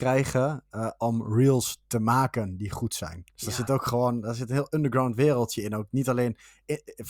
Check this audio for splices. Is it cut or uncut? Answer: cut